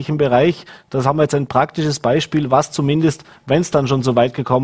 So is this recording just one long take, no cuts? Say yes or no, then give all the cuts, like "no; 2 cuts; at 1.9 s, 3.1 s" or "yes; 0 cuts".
yes; 0 cuts